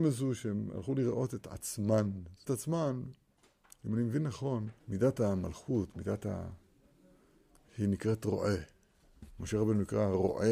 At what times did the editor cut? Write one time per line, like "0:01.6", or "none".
0:02.5
0:04.8

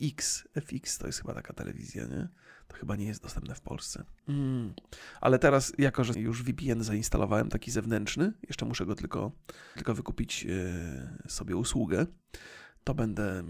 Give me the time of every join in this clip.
0:04.2
0:06.1
0:09.8

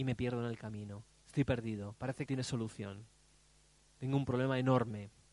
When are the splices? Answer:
0:02.3

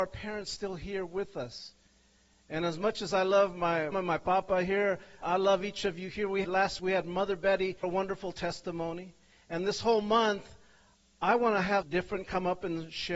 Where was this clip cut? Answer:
0:03.9
0:05.2
0:06.4
0:06.8
0:07.8
0:11.8

